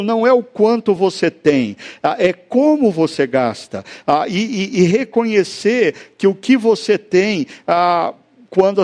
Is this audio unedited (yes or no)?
yes